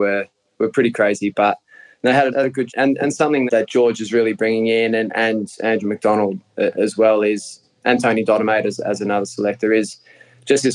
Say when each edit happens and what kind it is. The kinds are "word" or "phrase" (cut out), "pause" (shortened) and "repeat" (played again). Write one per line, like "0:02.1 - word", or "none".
0:02.3 - word
0:02.7 - word
0:03.5 - word